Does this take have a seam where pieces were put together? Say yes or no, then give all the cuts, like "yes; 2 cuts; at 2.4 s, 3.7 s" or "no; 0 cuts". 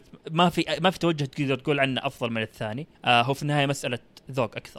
yes; 1 cut; at 2.9 s